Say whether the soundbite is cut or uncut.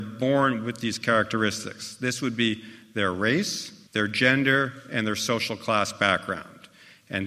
cut